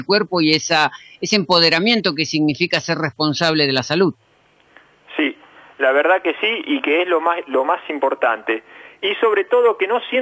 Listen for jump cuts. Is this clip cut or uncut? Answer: uncut